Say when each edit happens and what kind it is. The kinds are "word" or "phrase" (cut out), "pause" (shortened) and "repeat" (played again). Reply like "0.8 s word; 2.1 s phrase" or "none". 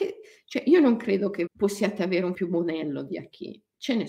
1.5 s word; 2.3 s word